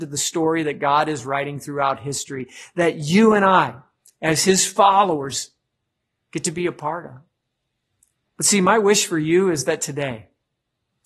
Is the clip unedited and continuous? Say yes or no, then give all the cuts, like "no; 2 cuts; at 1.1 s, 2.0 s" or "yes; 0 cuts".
yes; 0 cuts